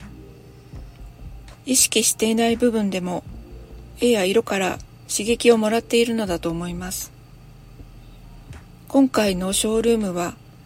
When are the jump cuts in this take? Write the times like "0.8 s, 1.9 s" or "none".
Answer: 1.6 s